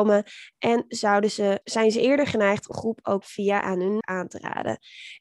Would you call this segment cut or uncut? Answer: cut